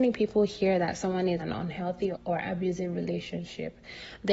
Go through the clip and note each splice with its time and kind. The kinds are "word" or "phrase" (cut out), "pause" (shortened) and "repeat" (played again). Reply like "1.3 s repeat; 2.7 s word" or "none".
1.4 s word; 2.1 s word